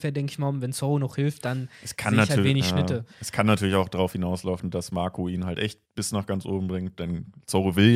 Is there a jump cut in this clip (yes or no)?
yes